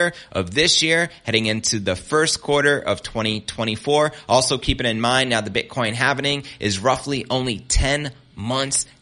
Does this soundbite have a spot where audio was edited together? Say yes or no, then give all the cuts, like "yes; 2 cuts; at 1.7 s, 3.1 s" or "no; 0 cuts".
no; 0 cuts